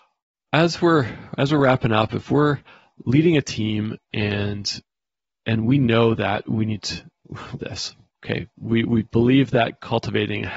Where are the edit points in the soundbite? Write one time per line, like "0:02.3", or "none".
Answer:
0:07.6